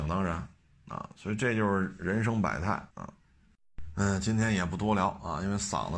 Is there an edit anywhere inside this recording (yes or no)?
yes